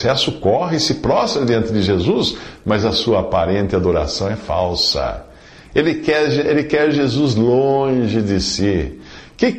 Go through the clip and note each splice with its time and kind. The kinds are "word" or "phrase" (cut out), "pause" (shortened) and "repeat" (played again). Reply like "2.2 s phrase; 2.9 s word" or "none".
none